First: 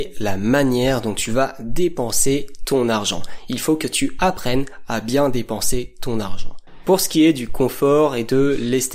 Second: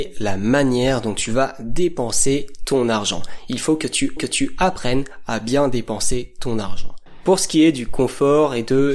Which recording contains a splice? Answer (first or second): second